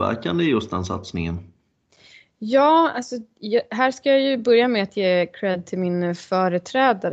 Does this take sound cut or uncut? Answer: uncut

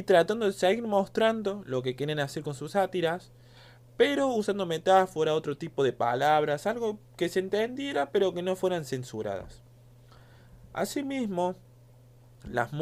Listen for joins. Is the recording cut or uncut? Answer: uncut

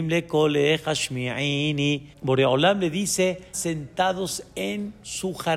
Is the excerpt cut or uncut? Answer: cut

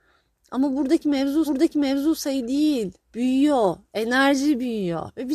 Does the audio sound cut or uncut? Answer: cut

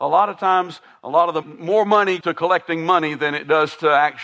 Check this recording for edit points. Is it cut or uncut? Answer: cut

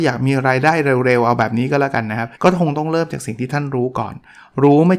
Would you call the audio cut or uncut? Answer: cut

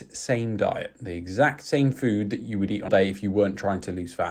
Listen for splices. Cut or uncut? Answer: cut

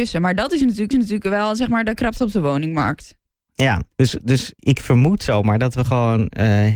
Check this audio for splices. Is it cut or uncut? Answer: cut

